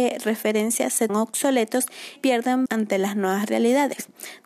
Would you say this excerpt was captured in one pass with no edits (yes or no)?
no